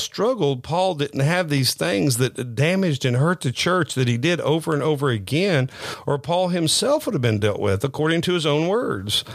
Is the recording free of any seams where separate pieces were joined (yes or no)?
yes